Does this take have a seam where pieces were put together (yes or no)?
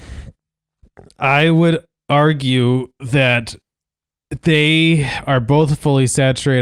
no